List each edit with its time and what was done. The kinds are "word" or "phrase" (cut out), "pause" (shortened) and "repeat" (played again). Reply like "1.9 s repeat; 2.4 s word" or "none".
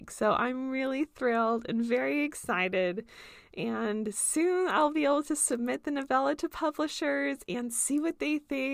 none